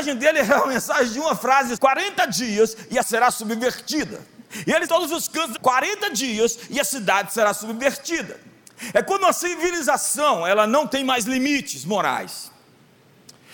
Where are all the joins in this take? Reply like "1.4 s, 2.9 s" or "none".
1.8 s, 3.0 s, 4.9 s, 5.6 s